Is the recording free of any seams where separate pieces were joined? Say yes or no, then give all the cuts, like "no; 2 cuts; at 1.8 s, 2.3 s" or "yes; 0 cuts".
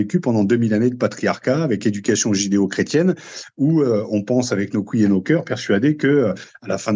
yes; 0 cuts